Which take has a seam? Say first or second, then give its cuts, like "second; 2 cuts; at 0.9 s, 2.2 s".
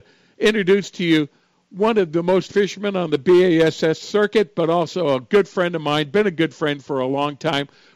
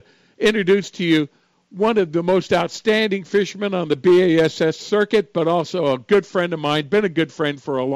first; 1 cut; at 2.5 s